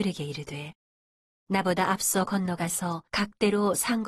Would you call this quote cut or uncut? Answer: cut